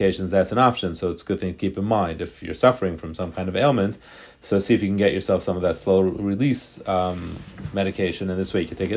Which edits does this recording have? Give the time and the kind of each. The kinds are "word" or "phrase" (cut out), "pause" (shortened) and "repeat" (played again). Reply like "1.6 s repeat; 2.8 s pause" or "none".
none